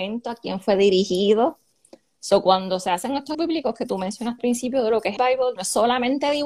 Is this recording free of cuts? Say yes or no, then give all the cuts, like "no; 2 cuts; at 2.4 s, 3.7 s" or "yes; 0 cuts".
no; 4 cuts; at 3.3 s, 4.4 s, 5.2 s, 5.6 s